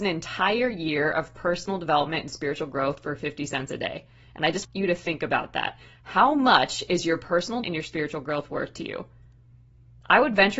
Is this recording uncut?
no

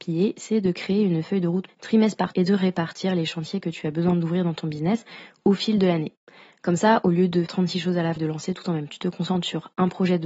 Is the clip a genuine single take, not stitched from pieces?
no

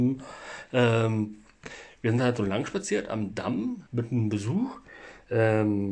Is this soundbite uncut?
no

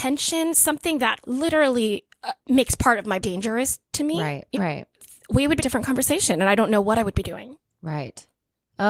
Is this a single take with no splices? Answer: no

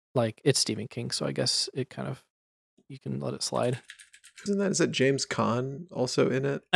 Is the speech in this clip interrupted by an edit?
yes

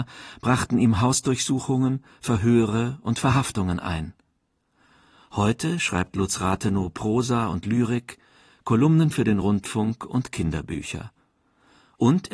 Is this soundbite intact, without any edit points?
yes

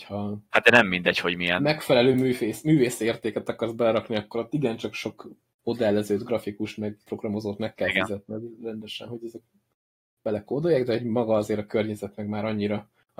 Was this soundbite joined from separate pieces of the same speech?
no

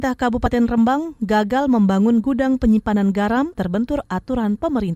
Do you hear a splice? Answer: yes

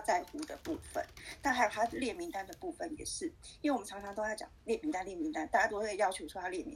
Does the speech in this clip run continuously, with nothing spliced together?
yes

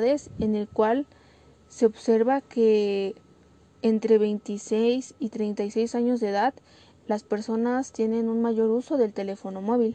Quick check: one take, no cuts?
yes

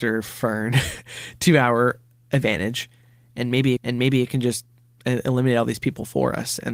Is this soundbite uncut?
no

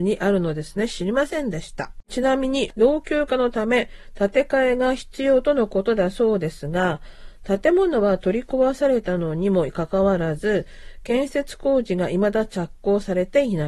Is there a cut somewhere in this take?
yes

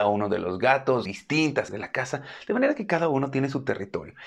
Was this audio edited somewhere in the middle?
yes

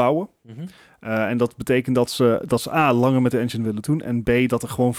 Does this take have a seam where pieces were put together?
no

